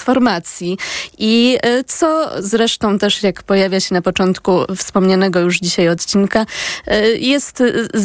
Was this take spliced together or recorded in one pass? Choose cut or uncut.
uncut